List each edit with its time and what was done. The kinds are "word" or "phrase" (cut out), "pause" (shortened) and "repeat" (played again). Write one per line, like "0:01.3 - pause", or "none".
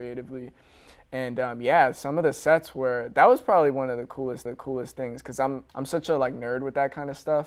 0:04.5 - repeat
0:05.7 - pause